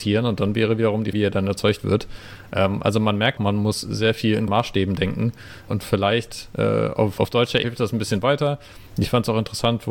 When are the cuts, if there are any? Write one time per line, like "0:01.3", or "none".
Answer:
0:01.1
0:03.4
0:04.5
0:05.7
0:07.2
0:07.6